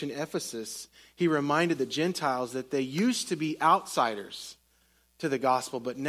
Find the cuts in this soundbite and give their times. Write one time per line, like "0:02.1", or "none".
none